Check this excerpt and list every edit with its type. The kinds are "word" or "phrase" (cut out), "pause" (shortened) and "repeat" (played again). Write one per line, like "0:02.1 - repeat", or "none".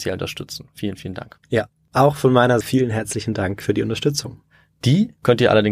0:01.4 - pause
0:02.6 - word